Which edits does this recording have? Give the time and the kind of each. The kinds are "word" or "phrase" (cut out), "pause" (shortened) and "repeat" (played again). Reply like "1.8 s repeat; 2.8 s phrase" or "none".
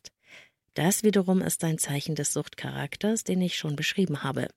none

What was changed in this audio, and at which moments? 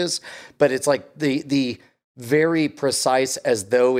none

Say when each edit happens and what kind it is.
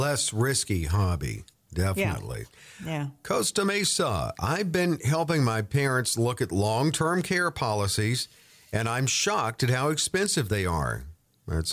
none

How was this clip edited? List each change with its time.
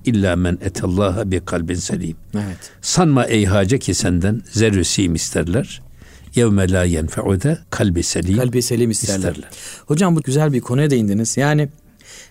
7.6 s pause; 10.2 s phrase

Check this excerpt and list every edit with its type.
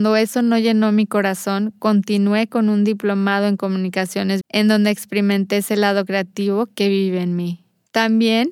4.4 s word

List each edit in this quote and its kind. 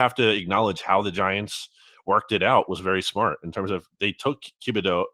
none

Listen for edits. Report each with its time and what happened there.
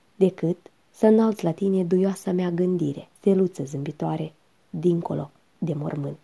3.2 s pause

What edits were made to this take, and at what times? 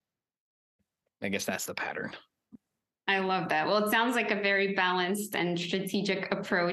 none

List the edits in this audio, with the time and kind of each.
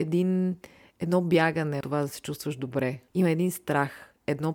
1.8 s word

